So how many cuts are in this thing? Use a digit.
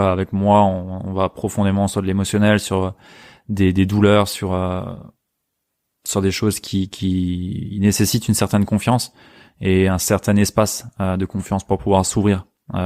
0